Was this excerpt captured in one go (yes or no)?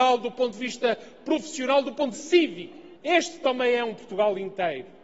no